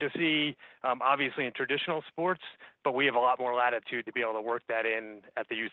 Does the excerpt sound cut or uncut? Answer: uncut